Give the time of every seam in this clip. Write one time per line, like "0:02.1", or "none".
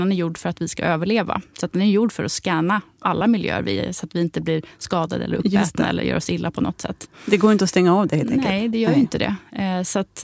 none